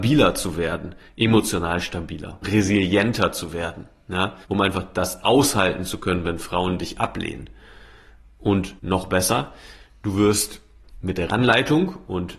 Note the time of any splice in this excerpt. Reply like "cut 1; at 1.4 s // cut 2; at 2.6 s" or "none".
cut 1; at 2.4 s // cut 2; at 4.4 s // cut 3; at 8.8 s // cut 4; at 11.3 s

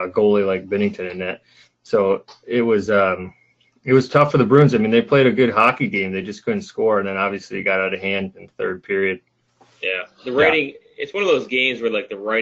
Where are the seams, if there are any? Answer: none

